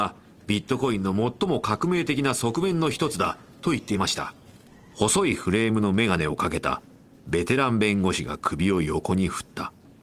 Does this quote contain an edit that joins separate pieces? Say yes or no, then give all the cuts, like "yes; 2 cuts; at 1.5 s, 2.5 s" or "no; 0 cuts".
yes; 1 cut; at 4.7 s